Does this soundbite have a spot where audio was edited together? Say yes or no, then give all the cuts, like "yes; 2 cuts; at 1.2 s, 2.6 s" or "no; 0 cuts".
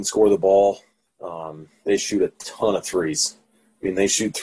no; 0 cuts